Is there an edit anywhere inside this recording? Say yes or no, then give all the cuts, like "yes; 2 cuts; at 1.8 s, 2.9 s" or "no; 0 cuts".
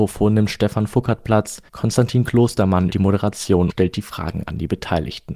yes; 3 cuts; at 1.7 s, 2.9 s, 3.7 s